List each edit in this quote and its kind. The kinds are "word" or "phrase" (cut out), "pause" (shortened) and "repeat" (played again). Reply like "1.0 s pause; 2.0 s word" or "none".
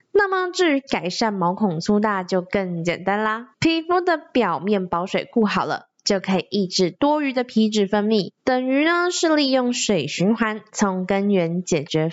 3.5 s pause; 8.4 s pause